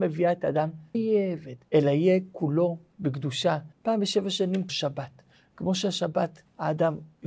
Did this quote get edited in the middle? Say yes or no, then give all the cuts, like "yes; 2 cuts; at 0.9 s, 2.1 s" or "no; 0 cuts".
yes; 4 cuts; at 0.9 s, 1.6 s, 3.7 s, 4.7 s